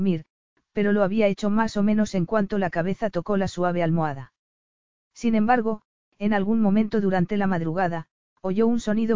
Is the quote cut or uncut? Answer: uncut